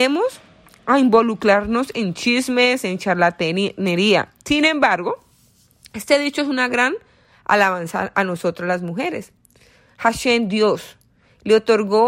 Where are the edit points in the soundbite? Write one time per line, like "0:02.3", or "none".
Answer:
none